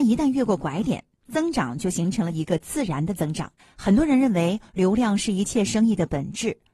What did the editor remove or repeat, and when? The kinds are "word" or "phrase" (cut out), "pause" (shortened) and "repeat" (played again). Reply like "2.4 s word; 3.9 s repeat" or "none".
3.6 s pause